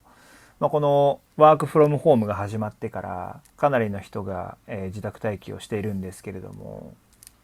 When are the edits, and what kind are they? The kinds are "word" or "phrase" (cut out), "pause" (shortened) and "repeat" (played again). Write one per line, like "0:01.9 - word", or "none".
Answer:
0:01.3 - pause
0:03.5 - pause

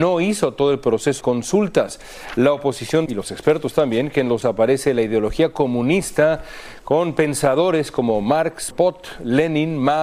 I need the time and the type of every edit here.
0:01.2 - phrase
0:03.1 - word
0:04.4 - word
0:08.7 - word

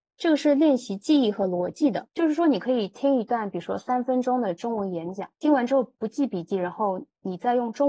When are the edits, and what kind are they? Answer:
0:02.1 - pause
0:05.3 - pause

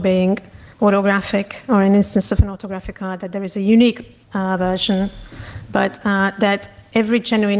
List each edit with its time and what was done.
0:04.2 - pause

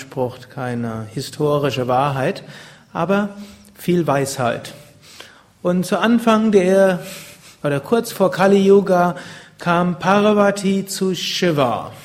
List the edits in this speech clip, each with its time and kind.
none

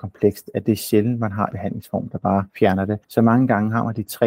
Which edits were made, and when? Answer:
0:01.5 - word
0:02.5 - pause
0:03.0 - pause

